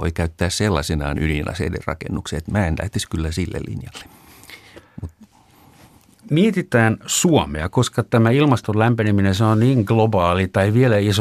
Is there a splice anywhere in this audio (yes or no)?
no